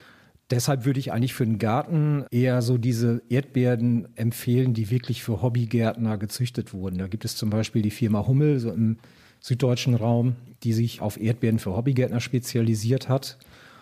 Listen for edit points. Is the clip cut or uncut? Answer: cut